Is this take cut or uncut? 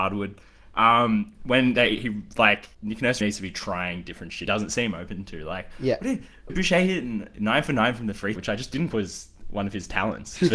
cut